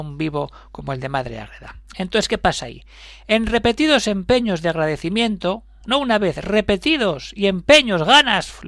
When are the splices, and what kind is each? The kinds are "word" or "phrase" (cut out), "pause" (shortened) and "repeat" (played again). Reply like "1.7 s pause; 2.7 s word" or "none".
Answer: 1.9 s pause